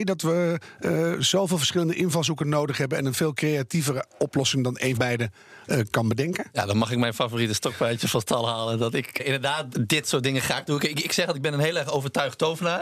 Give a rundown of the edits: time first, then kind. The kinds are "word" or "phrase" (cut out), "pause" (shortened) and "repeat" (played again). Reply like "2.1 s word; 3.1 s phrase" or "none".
5.0 s word; 9.2 s word; 9.7 s word